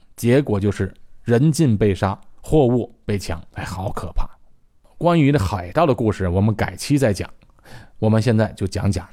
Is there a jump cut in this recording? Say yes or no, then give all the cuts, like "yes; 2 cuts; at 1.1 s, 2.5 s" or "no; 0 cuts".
yes; 3 cuts; at 2.4 s, 3.5 s, 4.7 s